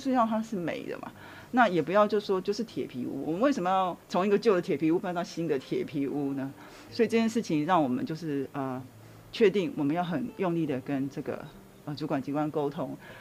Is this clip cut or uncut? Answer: cut